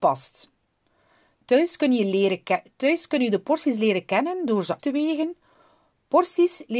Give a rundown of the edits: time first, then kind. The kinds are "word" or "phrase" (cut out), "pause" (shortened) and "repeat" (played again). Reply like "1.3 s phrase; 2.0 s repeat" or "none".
4.8 s word